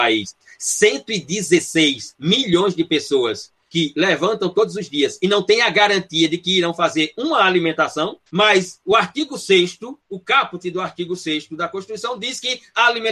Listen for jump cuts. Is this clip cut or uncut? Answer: cut